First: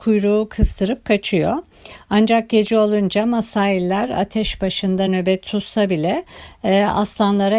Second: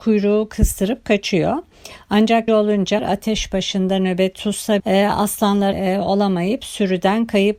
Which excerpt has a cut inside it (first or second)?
second